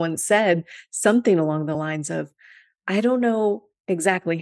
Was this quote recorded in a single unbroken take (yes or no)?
yes